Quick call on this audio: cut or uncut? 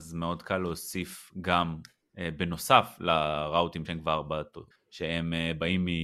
cut